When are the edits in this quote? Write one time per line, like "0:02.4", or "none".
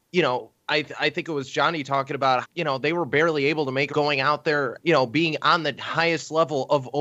0:02.4
0:03.9
0:04.8

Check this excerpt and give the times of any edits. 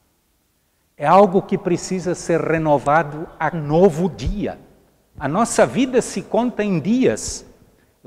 0:03.5

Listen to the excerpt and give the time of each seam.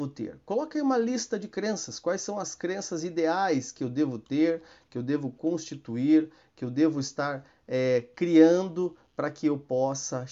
none

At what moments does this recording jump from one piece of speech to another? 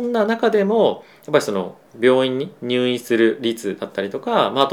0:01.9

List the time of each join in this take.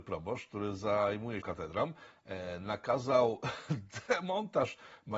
0:01.4

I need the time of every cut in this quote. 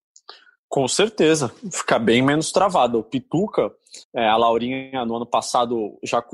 0:04.0

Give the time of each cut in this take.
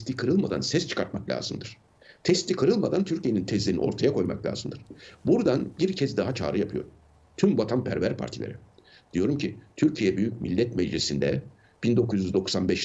none

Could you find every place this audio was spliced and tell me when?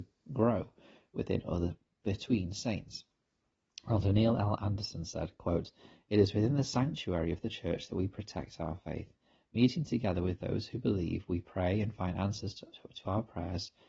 none

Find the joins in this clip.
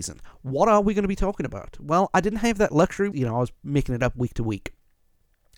0:03.1

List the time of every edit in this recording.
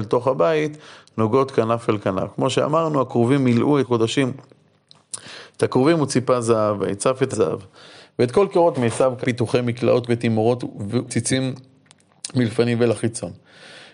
0:03.8
0:07.3
0:08.7
0:09.2
0:10.1
0:11.1

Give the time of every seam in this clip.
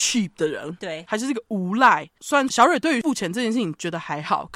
none

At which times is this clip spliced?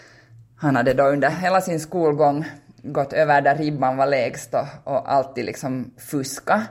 0:01.3

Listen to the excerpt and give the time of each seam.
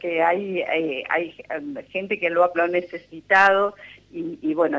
0:02.5

